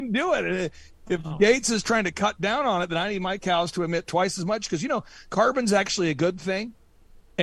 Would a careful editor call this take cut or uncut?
uncut